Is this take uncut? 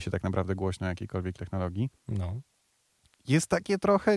no; 1 cut; at 1.4 s

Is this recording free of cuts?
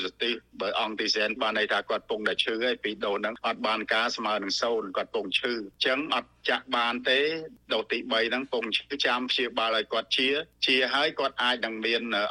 no; 1 cut; at 1.4 s

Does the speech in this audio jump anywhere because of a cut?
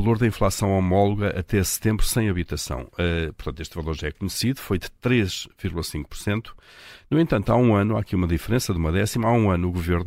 no; 0 cuts

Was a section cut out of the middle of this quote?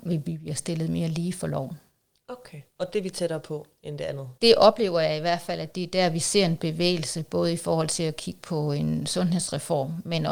yes; 2 cuts; at 2.7 s, 4.4 s

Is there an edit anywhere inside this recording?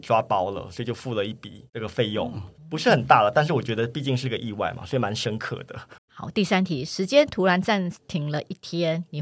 yes; 2 cuts; at 2.6 s, 6.0 s

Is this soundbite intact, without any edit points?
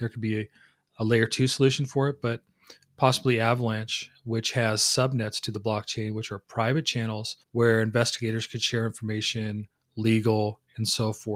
no; 1 cut; at 7.4 s

